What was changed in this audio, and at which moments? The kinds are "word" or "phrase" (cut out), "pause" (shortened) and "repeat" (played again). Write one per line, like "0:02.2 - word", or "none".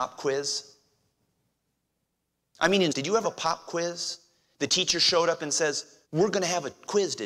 0:02.9 - word
0:03.2 - word
0:06.0 - pause

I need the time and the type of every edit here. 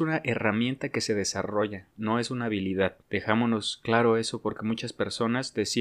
0:01.9 - pause
0:03.0 - pause

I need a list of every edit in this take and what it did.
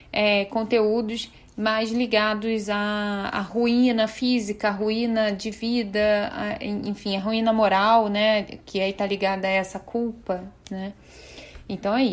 none

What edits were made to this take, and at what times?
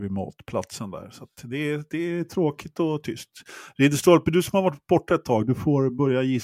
none

